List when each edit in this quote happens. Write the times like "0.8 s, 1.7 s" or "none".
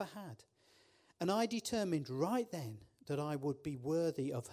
none